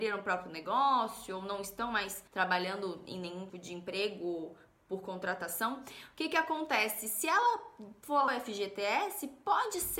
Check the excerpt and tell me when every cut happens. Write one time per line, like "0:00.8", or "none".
0:02.3
0:03.5
0:08.3